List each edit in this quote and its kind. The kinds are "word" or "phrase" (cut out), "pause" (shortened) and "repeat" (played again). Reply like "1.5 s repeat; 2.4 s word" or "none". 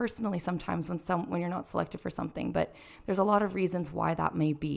none